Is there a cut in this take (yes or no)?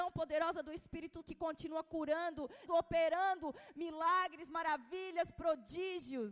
yes